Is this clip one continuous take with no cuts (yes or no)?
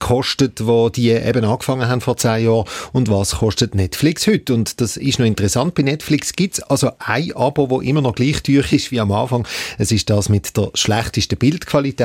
yes